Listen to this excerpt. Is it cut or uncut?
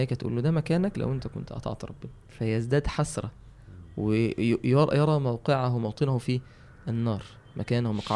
cut